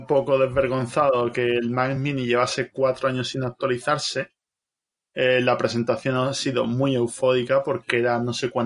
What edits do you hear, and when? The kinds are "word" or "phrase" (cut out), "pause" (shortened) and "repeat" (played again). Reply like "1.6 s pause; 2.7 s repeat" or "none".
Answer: none